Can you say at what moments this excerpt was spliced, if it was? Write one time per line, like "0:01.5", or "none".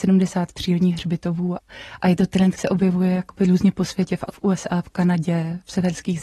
0:02.6
0:04.3